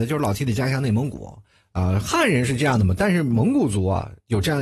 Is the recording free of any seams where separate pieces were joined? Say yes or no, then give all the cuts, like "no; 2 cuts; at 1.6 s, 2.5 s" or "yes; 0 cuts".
yes; 0 cuts